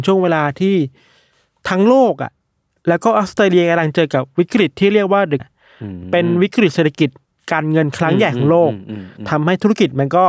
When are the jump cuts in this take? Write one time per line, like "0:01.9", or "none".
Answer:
0:05.4